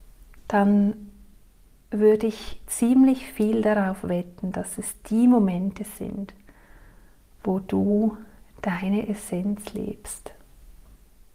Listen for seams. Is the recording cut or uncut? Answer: uncut